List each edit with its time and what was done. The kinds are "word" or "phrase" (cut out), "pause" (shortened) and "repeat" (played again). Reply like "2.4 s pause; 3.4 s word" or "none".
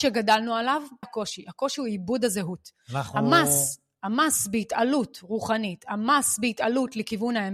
1.0 s phrase